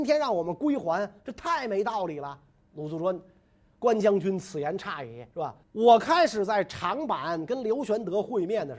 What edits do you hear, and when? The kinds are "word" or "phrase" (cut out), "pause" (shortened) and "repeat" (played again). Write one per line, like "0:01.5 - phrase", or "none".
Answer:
0:05.3 - pause
0:05.6 - pause